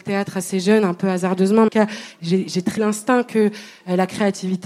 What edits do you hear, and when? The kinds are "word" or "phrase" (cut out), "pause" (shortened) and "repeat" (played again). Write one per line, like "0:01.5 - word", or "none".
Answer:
0:01.7 - phrase
0:02.8 - phrase